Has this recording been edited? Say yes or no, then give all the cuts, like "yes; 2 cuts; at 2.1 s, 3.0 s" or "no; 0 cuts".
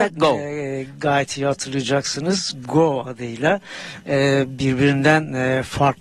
no; 0 cuts